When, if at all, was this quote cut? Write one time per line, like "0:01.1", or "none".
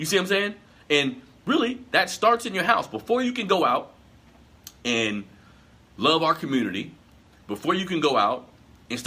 none